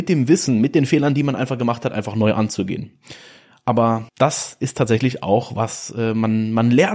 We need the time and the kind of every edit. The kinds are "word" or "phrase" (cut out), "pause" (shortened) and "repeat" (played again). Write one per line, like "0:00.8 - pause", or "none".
0:04.1 - pause